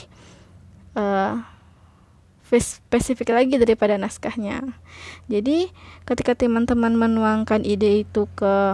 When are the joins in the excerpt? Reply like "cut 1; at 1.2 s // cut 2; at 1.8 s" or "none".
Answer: none